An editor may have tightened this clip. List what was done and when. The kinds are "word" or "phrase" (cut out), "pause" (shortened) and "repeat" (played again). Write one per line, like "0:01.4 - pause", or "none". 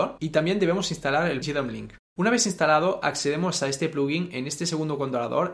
0:01.4 - word
0:02.0 - pause